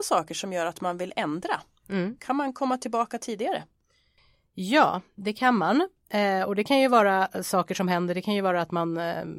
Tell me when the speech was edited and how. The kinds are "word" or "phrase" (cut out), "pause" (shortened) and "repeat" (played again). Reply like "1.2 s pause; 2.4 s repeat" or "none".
none